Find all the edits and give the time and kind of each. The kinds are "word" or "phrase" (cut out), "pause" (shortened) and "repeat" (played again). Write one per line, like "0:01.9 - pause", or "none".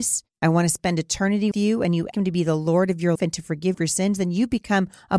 0:01.5 - word
0:02.1 - word
0:03.2 - word
0:03.7 - word